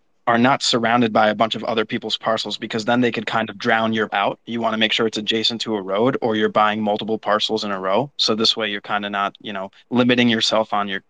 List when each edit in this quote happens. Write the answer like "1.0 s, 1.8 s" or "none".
4.1 s